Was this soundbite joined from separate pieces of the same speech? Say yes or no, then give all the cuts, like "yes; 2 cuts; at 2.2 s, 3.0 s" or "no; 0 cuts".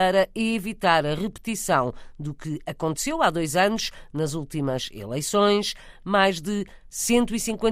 no; 0 cuts